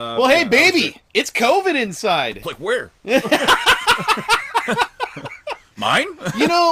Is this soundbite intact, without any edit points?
no; 2 cuts; at 1.1 s, 2.4 s

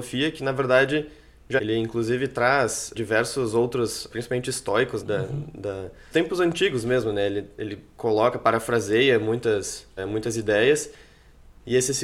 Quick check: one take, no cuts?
no; 6 cuts; at 1.6 s, 2.9 s, 4.1 s, 5.0 s, 6.1 s, 10.0 s

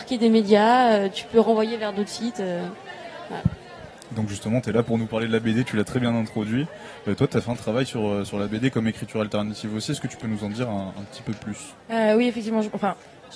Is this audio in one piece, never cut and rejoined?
yes; 0 cuts

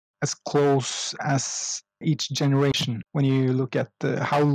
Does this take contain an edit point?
yes; 1 cut; at 3.1 s

